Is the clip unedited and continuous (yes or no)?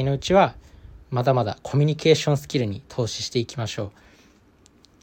no